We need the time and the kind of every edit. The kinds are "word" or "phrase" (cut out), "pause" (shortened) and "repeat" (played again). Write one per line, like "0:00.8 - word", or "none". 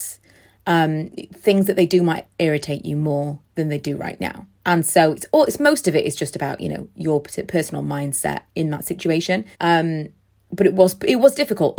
0:03.5 - pause
0:04.6 - pause
0:09.5 - pause